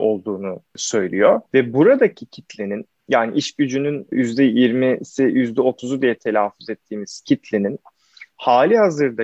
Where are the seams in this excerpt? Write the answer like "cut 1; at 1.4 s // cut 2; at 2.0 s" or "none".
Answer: cut 1; at 1.5 s // cut 2; at 3.0 s